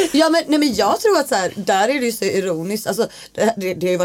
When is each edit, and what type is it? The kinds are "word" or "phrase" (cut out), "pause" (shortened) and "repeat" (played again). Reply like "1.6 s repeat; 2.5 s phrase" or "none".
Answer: none